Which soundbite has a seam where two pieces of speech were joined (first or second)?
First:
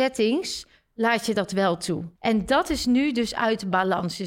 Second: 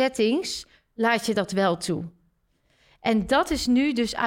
first